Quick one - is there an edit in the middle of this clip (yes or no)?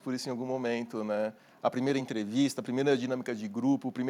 no